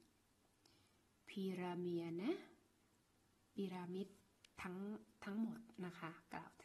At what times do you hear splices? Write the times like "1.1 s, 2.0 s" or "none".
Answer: none